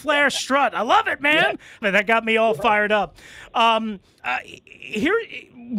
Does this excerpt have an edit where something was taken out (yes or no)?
yes